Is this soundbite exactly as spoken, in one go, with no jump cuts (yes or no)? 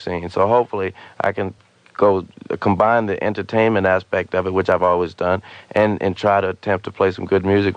yes